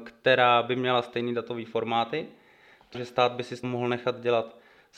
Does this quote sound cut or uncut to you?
cut